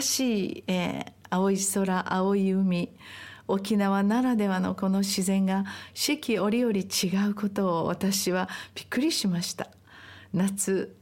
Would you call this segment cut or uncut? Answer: uncut